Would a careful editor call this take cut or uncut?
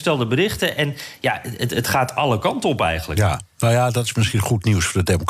uncut